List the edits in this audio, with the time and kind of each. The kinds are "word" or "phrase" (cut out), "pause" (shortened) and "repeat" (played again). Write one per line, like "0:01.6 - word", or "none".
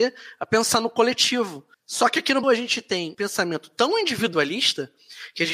0:01.7 - pause
0:02.4 - word
0:03.1 - word